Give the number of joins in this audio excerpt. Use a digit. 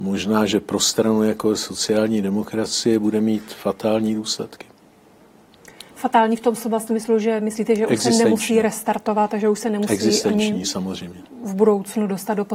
1